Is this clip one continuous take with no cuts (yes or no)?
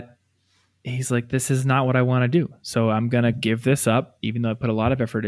yes